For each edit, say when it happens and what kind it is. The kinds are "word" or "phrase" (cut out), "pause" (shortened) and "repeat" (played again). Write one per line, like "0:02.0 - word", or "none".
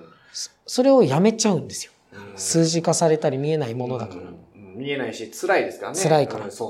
none